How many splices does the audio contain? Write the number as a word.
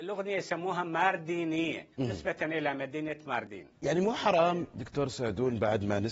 two